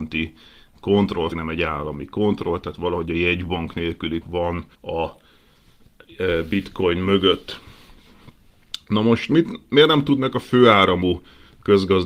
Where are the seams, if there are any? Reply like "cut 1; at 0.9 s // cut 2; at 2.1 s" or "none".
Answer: cut 1; at 1.3 s // cut 2; at 4.2 s // cut 3; at 4.7 s

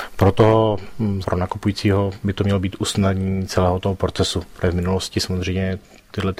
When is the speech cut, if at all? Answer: cut 1; at 1.2 s

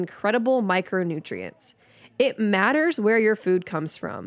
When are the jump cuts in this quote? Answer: none

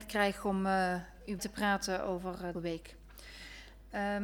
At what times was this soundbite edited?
cut 1; at 1.4 s // cut 2; at 2.5 s

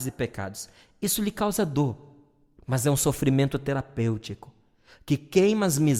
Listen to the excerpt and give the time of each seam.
none

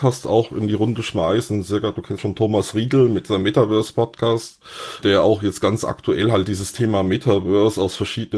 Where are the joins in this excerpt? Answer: cut 1; at 2.2 s

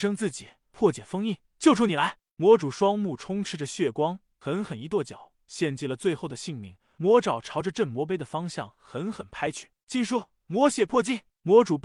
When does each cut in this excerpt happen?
none

